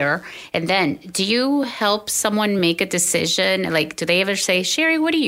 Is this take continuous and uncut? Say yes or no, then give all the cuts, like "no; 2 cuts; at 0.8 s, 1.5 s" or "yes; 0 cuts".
yes; 0 cuts